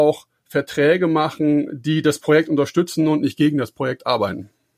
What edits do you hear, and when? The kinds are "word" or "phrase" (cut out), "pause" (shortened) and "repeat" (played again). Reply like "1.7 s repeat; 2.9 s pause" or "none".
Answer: none